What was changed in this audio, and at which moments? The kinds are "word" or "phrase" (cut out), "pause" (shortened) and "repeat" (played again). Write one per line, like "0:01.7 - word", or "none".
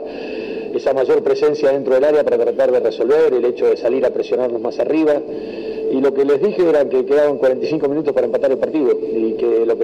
none